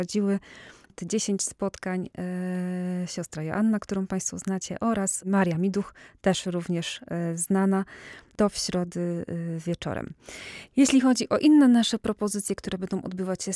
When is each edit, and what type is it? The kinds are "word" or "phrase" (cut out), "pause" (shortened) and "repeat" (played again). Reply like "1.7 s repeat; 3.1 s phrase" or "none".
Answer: none